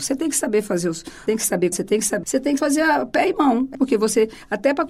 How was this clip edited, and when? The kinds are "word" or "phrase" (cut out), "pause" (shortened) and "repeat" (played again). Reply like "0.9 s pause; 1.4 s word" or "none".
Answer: 1.3 s phrase; 1.7 s word; 2.2 s word; 2.6 s word; 3.7 s word